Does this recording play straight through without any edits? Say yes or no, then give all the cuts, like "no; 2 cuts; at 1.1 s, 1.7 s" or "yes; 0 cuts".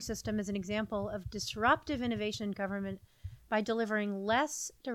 yes; 0 cuts